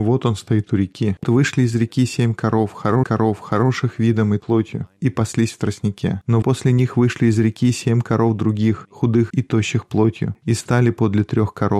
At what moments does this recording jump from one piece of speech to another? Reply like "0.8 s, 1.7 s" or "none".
1.2 s, 3.0 s, 4.4 s, 6.4 s, 9.3 s